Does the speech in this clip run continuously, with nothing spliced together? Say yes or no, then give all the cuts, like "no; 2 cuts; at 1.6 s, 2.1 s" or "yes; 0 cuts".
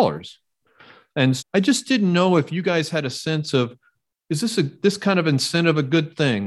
no; 1 cut; at 1.4 s